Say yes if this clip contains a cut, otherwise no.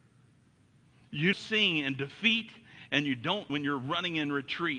yes